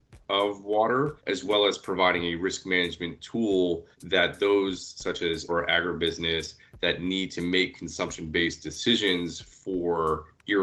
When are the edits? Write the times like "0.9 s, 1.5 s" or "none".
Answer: 1.2 s, 3.9 s, 5.5 s

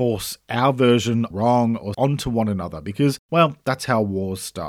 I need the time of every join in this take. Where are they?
1.3 s, 1.9 s

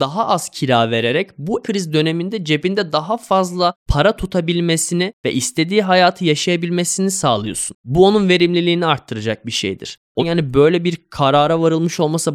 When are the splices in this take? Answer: 1.6 s, 10.2 s

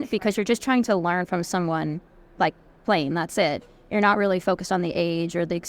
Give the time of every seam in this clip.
none

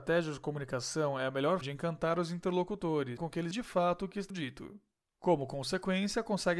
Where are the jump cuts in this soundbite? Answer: 1.6 s, 3.2 s, 3.5 s, 4.3 s

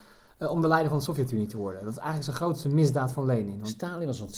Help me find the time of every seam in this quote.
none

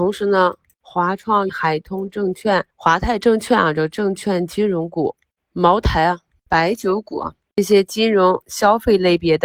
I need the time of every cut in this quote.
1.5 s, 2.7 s

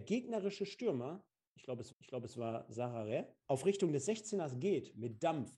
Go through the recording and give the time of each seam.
1.9 s, 3.4 s

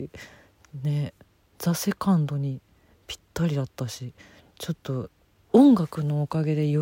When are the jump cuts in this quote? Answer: none

